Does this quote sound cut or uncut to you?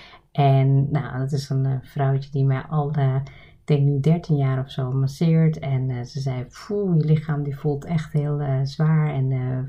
uncut